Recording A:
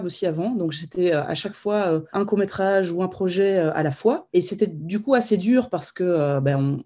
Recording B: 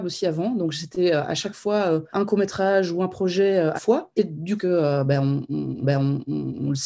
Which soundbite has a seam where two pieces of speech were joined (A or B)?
B